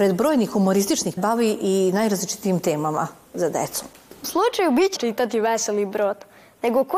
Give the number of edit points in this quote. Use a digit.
3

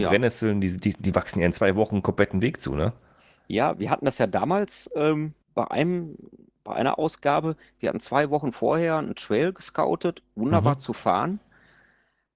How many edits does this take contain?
1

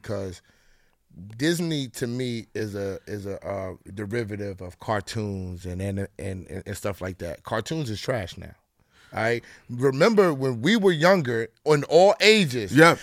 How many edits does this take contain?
0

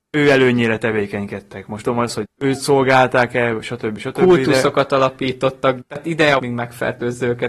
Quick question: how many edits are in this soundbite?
4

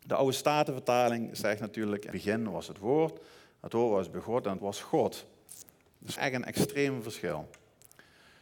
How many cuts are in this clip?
3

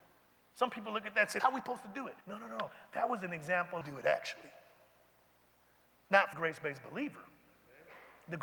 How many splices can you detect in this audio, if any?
4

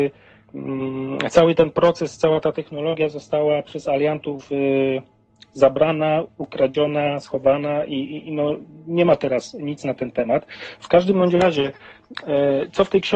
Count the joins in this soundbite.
0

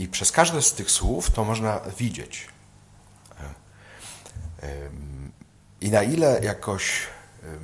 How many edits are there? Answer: 0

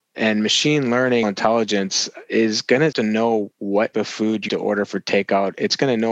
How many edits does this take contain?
4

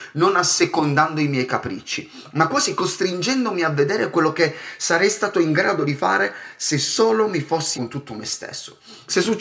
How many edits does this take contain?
1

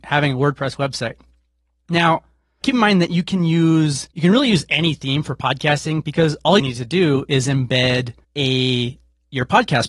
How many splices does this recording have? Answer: 4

